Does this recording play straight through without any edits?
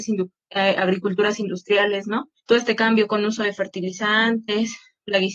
no; 1 cut; at 2.4 s

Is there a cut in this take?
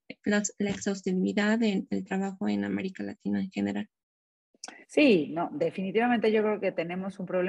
yes; 1 cut; at 4.8 s

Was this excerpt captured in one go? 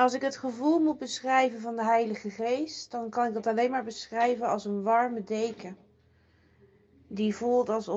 yes; 0 cuts

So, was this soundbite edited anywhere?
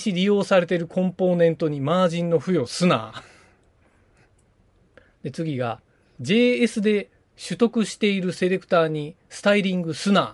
no; 0 cuts

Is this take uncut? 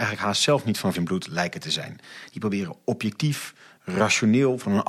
no; 1 cut; at 0.9 s

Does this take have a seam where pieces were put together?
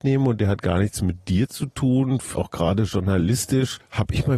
yes; 1 cut; at 2.3 s

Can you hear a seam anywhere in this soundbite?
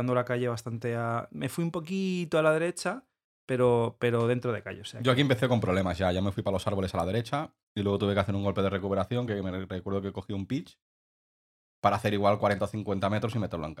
no; 0 cuts

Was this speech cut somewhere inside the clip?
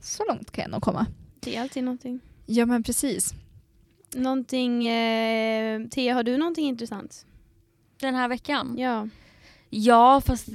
no; 0 cuts

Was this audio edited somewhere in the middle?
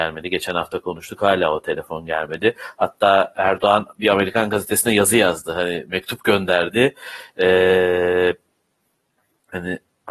no; 0 cuts

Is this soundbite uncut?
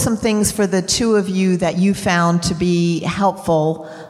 yes; 0 cuts

